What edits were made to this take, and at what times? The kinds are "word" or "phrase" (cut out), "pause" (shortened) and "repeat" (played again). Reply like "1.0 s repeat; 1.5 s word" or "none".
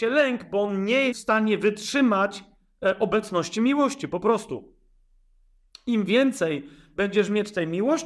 1.1 s word